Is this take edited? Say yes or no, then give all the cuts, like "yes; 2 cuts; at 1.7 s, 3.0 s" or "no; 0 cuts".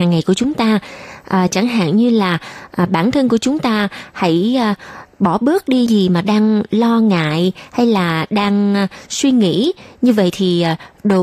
yes; 1 cut; at 5.9 s